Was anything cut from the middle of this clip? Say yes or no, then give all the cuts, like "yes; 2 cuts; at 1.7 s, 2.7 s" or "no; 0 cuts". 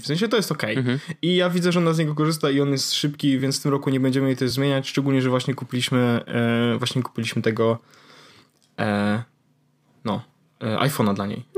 no; 0 cuts